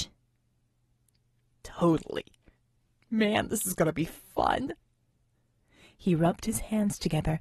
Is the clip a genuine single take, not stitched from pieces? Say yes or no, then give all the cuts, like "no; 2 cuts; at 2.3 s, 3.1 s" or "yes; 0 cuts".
yes; 0 cuts